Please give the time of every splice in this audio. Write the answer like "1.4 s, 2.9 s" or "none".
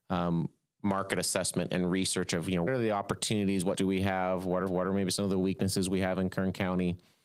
2.7 s, 3.7 s, 4.7 s